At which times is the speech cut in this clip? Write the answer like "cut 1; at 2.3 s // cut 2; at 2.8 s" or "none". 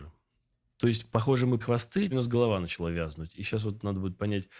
cut 1; at 1.6 s // cut 2; at 2.1 s